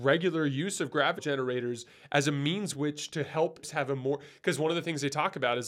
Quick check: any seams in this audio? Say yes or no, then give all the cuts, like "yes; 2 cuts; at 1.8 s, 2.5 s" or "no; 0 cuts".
yes; 3 cuts; at 1.2 s, 2.7 s, 3.6 s